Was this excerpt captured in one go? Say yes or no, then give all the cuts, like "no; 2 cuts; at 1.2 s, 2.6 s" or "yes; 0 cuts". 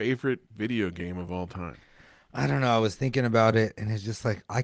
yes; 0 cuts